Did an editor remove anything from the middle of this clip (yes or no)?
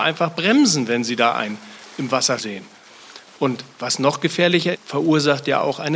yes